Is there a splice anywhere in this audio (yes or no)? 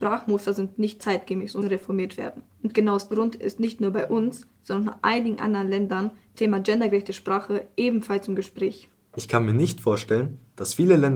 yes